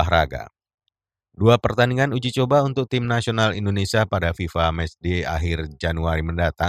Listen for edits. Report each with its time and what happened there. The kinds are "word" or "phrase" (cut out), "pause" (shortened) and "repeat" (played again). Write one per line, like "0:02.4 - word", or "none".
none